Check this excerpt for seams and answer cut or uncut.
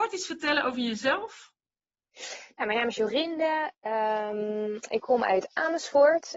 uncut